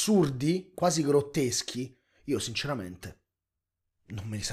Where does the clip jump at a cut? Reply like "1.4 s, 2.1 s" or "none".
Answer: none